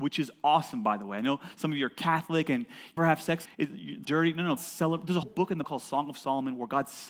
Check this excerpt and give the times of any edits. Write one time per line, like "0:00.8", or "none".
0:03.0
0:03.4
0:04.0
0:04.6
0:05.2
0:05.6

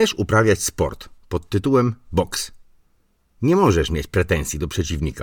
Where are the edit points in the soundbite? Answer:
none

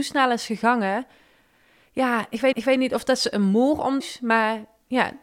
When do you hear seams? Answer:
0:02.5
0:04.0

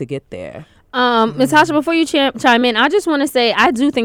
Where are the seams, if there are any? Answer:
none

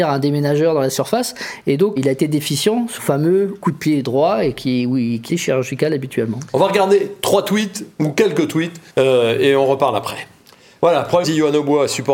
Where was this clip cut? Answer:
0:02.0
0:03.0
0:05.3
0:08.9
0:10.4
0:11.2

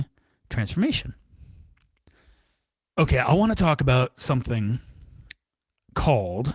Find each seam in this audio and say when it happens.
none

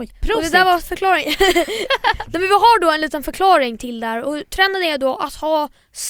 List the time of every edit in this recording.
none

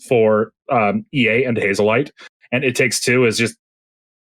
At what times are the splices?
none

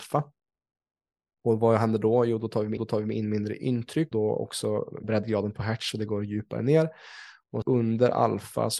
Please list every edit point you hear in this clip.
0:02.8
0:04.1
0:05.0
0:07.6

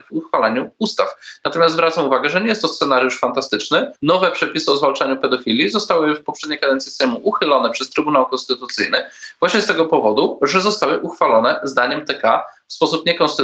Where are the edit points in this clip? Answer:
0:04.0

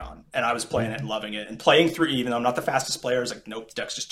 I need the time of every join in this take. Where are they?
none

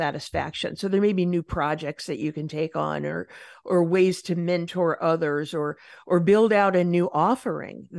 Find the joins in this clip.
none

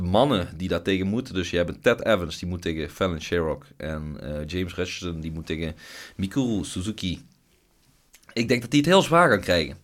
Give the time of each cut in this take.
none

